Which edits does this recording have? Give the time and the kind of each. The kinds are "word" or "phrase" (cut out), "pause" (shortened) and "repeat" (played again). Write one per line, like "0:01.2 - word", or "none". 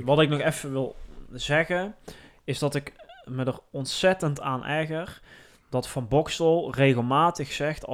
none